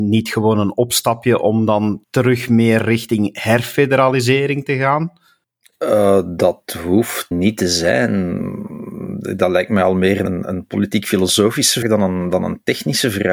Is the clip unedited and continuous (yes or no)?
no